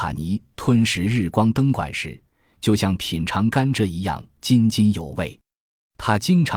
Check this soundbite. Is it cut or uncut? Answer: uncut